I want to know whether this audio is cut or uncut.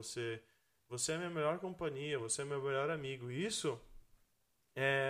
uncut